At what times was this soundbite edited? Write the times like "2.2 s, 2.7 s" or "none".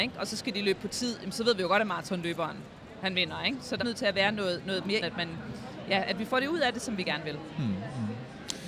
3.8 s, 5.0 s